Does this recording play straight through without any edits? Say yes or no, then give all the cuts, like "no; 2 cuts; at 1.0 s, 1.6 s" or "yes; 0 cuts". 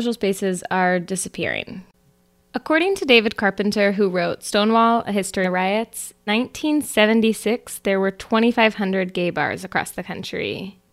no; 2 cuts; at 5.4 s, 6.3 s